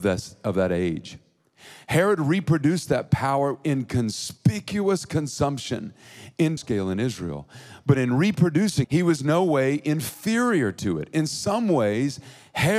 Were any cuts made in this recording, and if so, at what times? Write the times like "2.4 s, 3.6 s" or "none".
6.6 s, 8.8 s